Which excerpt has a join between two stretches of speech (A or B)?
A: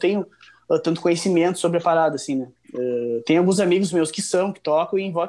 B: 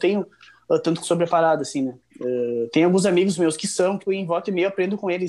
B